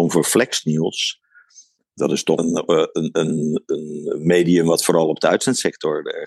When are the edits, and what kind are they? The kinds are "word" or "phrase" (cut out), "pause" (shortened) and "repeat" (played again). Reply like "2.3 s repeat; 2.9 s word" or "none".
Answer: 2.4 s word